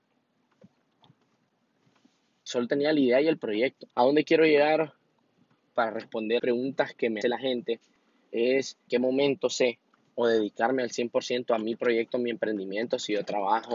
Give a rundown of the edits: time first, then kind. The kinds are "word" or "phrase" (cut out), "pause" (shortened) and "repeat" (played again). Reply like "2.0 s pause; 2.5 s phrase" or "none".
3.9 s pause; 6.4 s word; 7.2 s word; 8.9 s word; 10.0 s pause